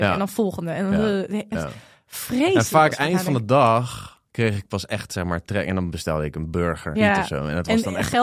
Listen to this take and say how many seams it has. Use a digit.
2